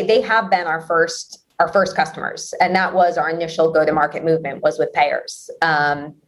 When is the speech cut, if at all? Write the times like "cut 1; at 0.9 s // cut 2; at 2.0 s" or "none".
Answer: none